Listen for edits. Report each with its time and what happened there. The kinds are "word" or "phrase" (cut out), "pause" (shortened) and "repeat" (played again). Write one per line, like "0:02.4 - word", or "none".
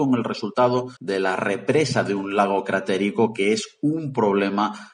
0:01.0 - pause